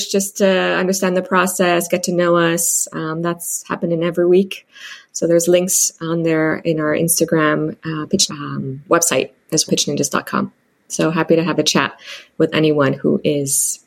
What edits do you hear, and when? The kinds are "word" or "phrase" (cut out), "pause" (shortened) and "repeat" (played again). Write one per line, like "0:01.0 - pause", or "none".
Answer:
0:08.3 - phrase
0:09.7 - word

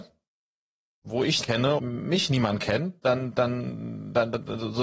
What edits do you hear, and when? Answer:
0:01.4 - word
0:01.8 - word
0:03.0 - pause

